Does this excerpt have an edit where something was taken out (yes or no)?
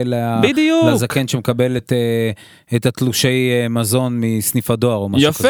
no